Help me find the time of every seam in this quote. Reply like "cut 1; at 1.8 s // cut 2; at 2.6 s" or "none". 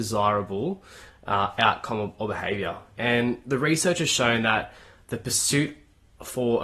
none